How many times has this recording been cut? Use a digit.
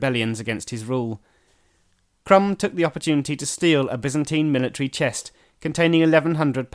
0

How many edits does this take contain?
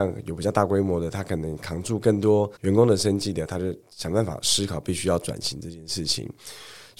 1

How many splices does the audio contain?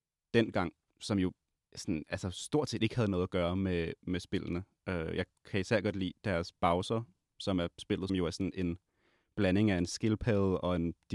1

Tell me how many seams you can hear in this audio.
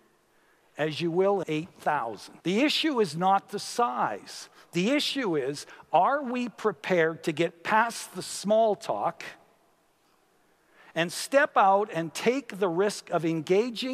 2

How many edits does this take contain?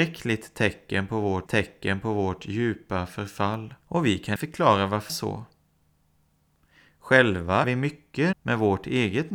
6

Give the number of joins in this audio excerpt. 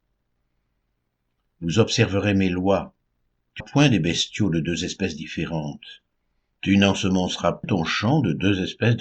2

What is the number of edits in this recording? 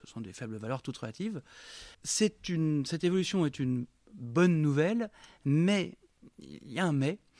1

